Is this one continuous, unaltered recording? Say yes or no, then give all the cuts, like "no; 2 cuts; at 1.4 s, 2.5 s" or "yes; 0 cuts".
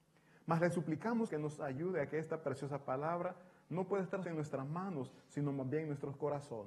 no; 2 cuts; at 1.3 s, 4.2 s